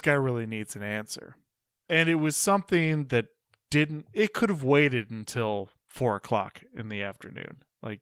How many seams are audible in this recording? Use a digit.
0